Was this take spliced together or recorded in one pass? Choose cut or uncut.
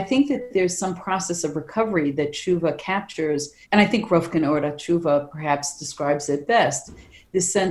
cut